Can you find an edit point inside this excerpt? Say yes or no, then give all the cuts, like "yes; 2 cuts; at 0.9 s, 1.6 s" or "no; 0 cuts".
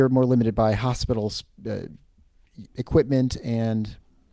yes; 1 cut; at 2.7 s